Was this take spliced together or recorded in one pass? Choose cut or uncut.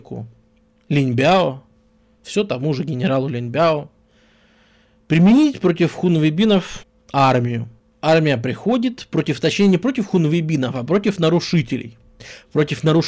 uncut